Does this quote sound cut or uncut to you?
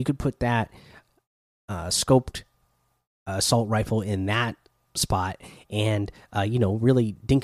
uncut